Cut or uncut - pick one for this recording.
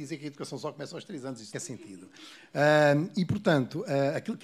cut